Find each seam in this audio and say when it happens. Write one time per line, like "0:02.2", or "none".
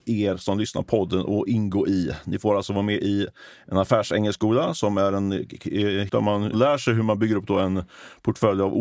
0:06.1